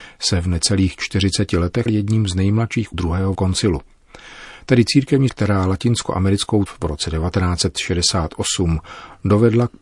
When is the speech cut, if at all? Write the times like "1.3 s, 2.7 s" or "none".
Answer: 1.9 s, 2.9 s, 3.3 s, 5.3 s, 6.7 s